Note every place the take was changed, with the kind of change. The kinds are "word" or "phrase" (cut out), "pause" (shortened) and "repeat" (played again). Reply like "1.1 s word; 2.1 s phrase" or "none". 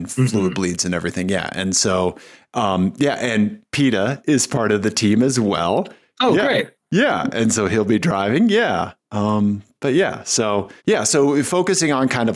10.8 s pause